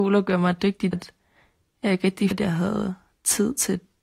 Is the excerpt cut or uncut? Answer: cut